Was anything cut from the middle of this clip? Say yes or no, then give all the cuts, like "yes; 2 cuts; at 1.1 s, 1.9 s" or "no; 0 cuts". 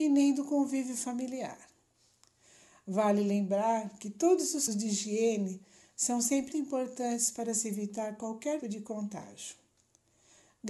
yes; 3 cuts; at 4.7 s, 6.5 s, 8.6 s